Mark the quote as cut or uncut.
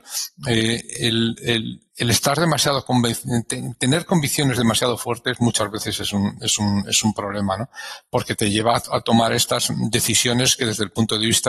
cut